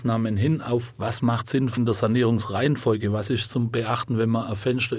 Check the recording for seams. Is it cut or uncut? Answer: uncut